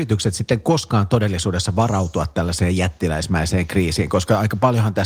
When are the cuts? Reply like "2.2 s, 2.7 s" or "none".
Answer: none